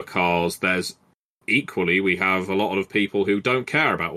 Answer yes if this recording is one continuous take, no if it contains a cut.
yes